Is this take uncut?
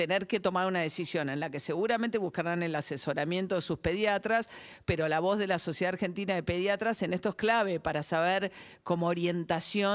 yes; 0 cuts

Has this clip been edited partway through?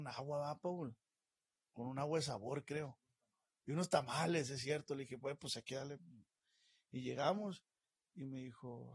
no; 0 cuts

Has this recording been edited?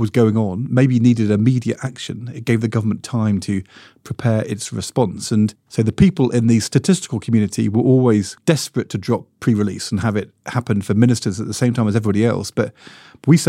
no; 0 cuts

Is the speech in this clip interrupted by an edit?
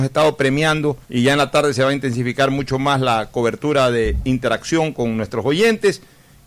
yes; 1 cut; at 1.0 s

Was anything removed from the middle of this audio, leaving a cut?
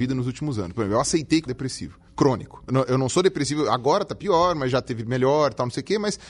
yes; 3 cuts; at 1.5 s, 2.1 s, 2.7 s

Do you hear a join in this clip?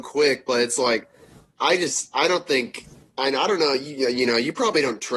no; 0 cuts

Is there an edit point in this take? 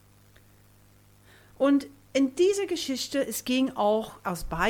no; 0 cuts

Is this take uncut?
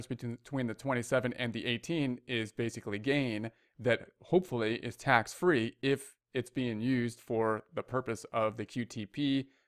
yes; 0 cuts

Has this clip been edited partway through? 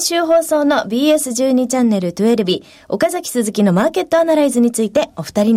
no; 0 cuts

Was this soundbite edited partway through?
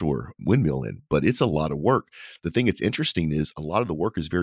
no; 0 cuts

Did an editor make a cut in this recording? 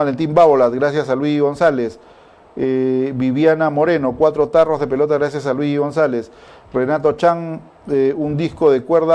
no; 0 cuts

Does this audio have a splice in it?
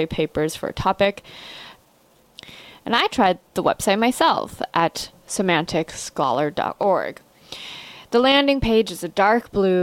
no; 0 cuts

